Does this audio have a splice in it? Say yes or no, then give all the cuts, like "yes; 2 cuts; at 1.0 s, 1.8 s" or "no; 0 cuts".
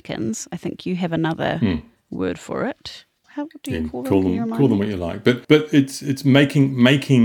yes; 1 cut; at 5.4 s